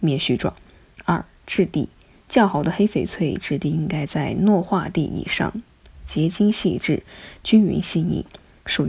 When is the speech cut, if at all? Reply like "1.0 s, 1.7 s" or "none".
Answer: none